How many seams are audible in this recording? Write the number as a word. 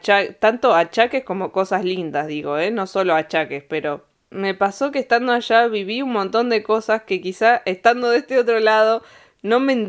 zero